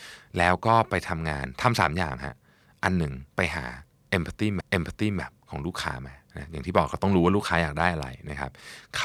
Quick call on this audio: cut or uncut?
cut